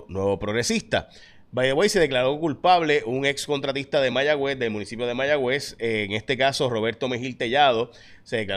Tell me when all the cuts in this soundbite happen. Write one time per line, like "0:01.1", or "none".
none